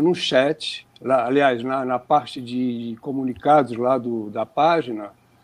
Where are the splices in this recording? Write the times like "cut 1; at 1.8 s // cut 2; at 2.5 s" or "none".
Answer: none